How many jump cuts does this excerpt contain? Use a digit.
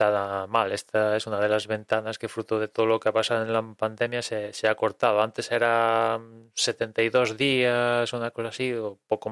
0